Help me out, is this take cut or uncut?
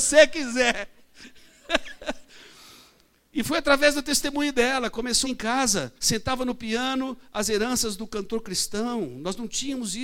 cut